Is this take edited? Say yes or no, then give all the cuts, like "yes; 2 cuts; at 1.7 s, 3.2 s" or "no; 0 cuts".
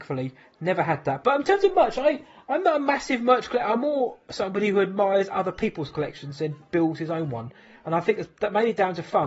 no; 0 cuts